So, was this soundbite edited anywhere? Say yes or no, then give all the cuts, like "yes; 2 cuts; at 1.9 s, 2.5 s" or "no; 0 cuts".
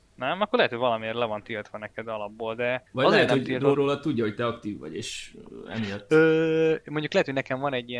yes; 2 cuts; at 2.9 s, 3.7 s